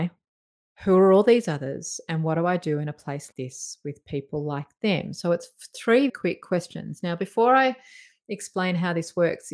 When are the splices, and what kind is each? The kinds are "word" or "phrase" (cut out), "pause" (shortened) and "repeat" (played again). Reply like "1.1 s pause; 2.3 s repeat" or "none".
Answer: 3.3 s word; 6.1 s word